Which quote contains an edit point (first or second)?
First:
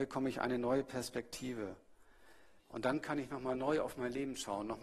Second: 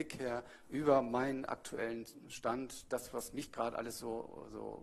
first